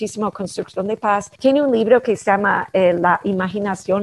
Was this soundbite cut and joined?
yes; 1 cut; at 1.3 s

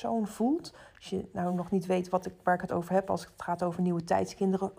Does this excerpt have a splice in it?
no; 0 cuts

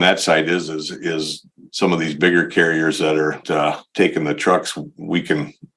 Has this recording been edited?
yes; 1 cut; at 3.4 s

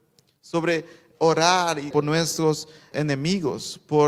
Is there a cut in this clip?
yes; 3 cuts; at 1.1 s, 1.9 s, 2.9 s

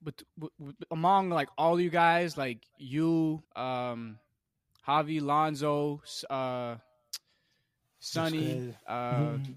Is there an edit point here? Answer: yes; 1 cut; at 3.4 s

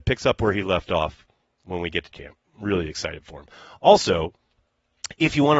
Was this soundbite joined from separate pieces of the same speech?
yes; 1 cut; at 2.1 s

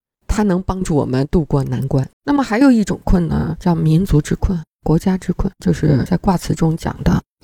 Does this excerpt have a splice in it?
yes; 2 cuts; at 2.1 s, 5.6 s

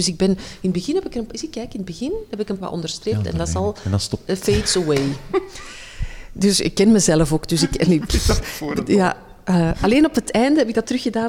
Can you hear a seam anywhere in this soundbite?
yes; 1 cut; at 2.6 s

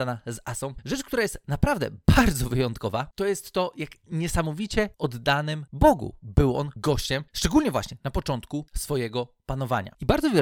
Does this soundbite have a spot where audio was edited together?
no; 0 cuts

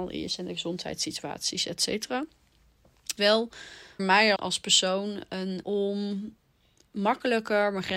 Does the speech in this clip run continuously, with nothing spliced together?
no; 4 cuts; at 3.2 s, 4.0 s, 4.4 s, 5.6 s

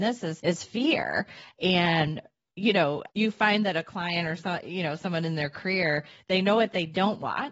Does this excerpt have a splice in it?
no; 0 cuts

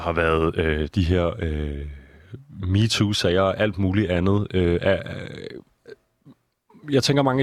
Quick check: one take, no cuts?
yes; 0 cuts

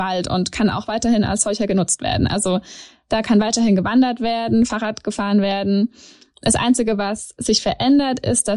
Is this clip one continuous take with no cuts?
yes; 0 cuts

